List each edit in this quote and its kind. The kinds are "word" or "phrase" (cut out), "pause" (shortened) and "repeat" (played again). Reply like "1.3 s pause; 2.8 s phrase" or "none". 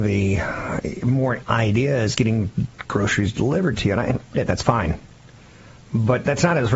1.4 s word; 2.1 s word; 4.4 s phrase